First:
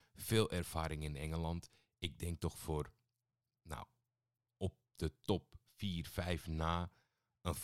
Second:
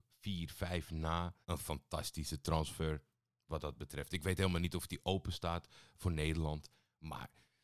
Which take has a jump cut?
second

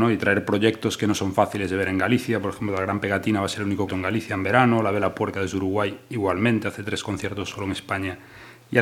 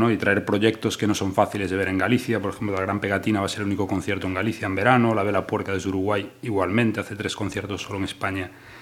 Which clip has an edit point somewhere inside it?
first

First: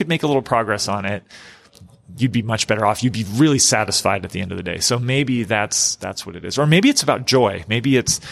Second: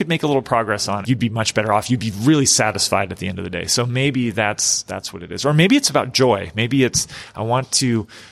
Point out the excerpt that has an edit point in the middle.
second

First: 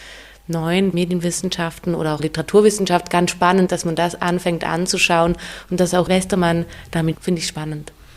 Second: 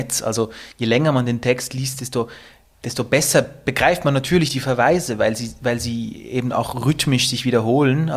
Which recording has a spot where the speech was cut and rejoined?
first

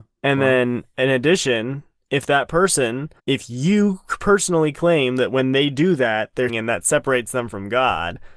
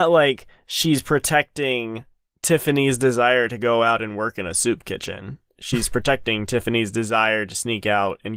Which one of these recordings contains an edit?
first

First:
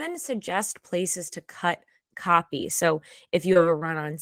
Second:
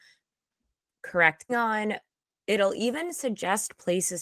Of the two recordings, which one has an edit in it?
second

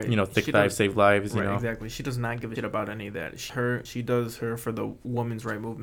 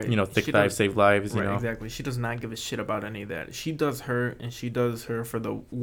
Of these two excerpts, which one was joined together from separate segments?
first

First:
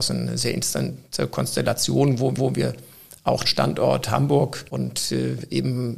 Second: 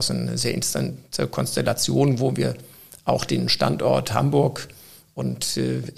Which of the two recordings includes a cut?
first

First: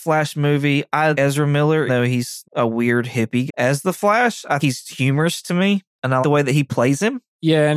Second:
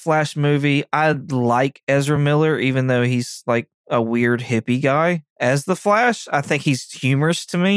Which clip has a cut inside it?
first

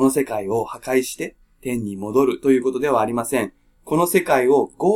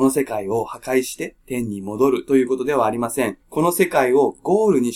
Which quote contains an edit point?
second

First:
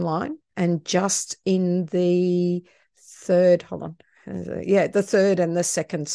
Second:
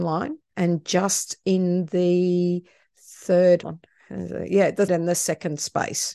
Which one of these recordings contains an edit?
second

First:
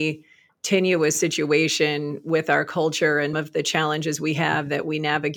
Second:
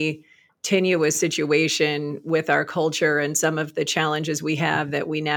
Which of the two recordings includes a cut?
first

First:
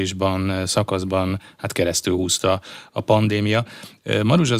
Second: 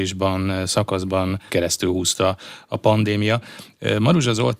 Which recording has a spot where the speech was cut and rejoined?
second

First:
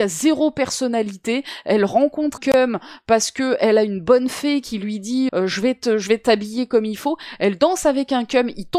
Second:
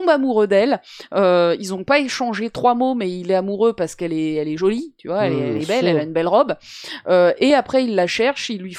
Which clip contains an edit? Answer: first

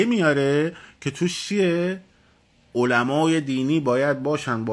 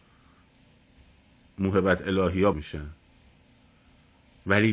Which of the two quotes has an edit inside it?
second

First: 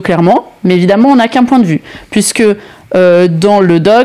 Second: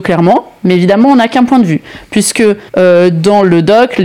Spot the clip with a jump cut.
second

